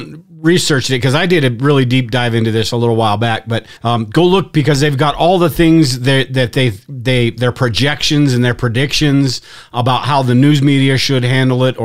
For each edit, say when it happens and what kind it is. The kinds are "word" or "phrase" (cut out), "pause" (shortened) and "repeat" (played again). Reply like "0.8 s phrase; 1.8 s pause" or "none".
3.8 s pause